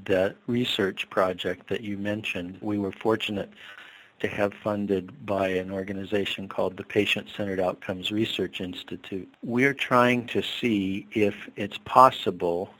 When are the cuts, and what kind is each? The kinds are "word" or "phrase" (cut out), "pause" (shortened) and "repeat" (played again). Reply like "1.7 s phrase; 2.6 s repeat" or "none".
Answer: 2.6 s word

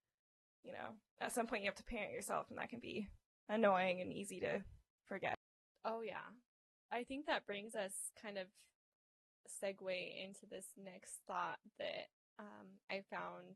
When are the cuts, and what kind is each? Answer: none

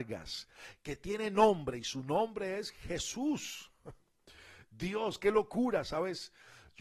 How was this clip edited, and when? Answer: none

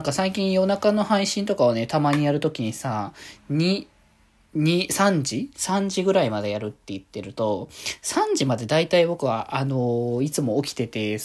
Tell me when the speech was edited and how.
none

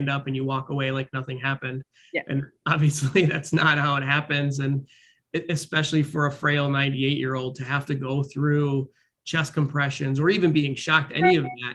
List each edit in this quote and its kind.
none

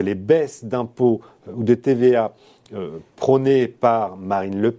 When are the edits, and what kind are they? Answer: none

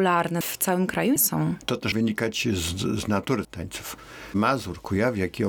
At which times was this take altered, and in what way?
1.2 s word; 1.9 s word; 3.4 s word

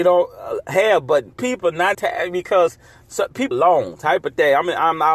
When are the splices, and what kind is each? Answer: 1.4 s word; 1.9 s word; 3.5 s word

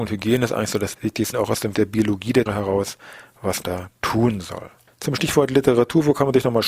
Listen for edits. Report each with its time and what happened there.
0.9 s word; 1.3 s word; 1.7 s word; 2.5 s word; 3.6 s word

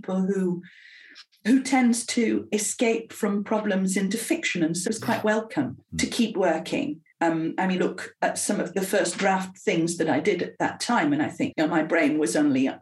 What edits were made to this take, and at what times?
4.9 s word; 5.9 s pause; 7.1 s pause; 7.8 s phrase; 8.7 s word; 11.5 s word

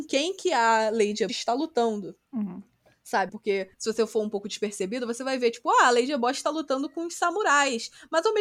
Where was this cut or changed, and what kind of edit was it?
1.3 s word; 2.2 s pause; 3.3 s word; 3.7 s pause

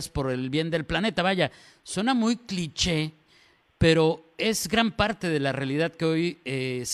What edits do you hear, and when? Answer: none

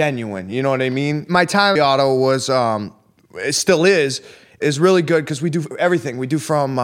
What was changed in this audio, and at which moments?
1.8 s phrase

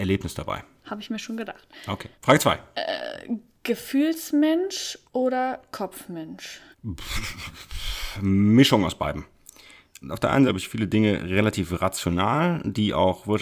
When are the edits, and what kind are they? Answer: 2.1 s pause; 5.1 s pause; 6.7 s pause; 10.0 s word; 10.5 s phrase

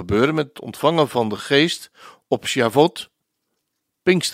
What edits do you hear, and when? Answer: none

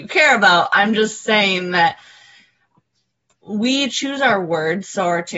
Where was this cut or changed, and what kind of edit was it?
none

